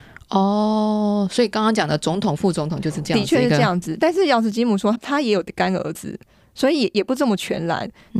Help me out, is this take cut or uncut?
uncut